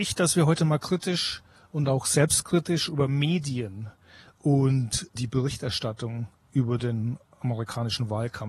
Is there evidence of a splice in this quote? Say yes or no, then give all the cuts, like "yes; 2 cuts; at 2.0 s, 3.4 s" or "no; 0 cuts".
no; 0 cuts